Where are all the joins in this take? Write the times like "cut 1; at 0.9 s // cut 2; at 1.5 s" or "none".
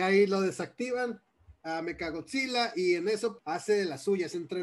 cut 1; at 3.4 s